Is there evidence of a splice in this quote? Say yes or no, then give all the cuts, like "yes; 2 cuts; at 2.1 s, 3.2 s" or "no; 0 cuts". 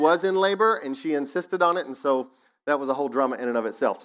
no; 0 cuts